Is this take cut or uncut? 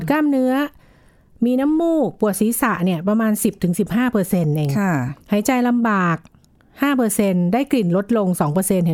cut